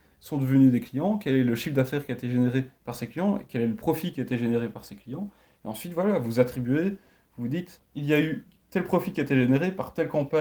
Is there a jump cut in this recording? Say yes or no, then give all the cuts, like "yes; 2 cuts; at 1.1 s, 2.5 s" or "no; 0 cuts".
no; 0 cuts